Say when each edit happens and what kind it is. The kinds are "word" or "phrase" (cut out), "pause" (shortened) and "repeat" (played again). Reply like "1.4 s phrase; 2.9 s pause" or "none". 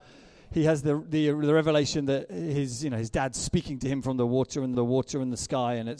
4.7 s repeat